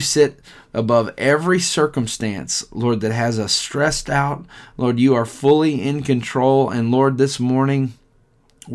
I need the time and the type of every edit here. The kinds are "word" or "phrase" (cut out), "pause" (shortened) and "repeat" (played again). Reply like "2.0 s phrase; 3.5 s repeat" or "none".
none

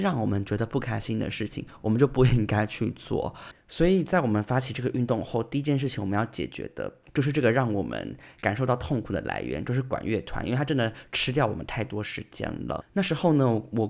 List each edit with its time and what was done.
7.1 s pause

